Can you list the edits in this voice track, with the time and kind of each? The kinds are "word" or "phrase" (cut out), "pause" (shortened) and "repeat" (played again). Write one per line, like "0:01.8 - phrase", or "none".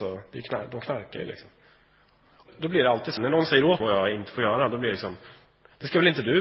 0:02.5 - word
0:03.2 - word
0:03.8 - word